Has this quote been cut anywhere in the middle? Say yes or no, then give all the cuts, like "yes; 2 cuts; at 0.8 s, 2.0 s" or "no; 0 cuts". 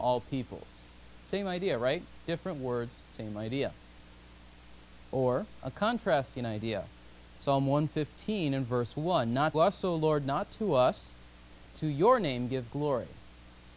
yes; 2 cuts; at 9.5 s, 11.7 s